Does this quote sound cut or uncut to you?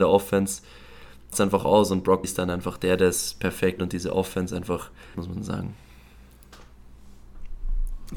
cut